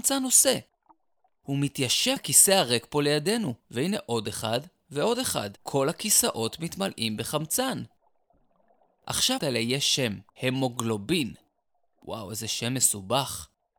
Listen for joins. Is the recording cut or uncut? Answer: cut